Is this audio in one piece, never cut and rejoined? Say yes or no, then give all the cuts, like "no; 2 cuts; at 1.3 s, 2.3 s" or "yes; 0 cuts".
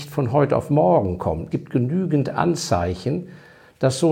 no; 1 cut; at 1.5 s